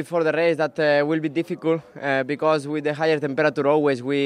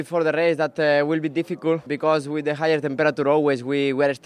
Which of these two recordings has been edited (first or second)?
second